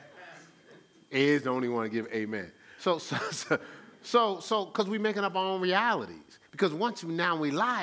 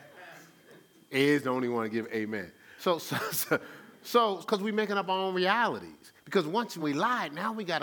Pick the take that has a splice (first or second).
second